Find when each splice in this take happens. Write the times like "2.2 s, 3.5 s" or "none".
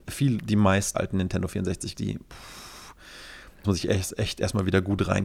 0.9 s, 1.9 s, 3.6 s